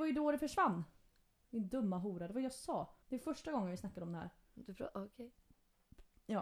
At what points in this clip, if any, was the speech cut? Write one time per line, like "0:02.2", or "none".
0:03.0